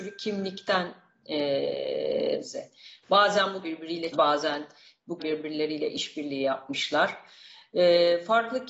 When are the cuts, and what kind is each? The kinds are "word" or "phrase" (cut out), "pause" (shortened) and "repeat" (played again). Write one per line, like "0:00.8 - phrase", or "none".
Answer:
0:02.4 - word
0:03.6 - word
0:04.1 - word
0:05.2 - word